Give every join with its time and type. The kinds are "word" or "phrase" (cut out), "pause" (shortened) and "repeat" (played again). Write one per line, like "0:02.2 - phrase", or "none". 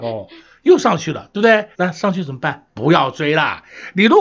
0:01.7 - pause